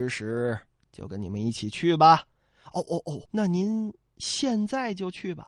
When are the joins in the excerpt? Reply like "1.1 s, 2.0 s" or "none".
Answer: 3.3 s